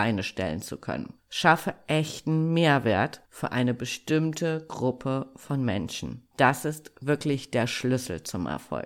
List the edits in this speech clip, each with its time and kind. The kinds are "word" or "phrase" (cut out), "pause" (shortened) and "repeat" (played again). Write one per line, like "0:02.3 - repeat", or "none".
0:01.2 - pause
0:03.2 - pause
0:06.3 - pause